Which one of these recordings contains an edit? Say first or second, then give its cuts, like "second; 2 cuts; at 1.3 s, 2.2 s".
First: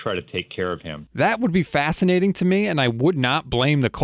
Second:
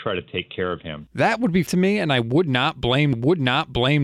second; 2 cuts; at 1.7 s, 3.1 s